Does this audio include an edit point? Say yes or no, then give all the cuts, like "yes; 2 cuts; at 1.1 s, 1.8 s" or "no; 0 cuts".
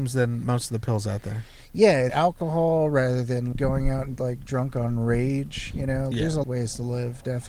yes; 5 cuts; at 2.1 s, 3.5 s, 4.2 s, 6.1 s, 6.4 s